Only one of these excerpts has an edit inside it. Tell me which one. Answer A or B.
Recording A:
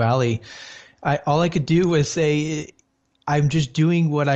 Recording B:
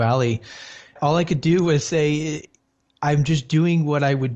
B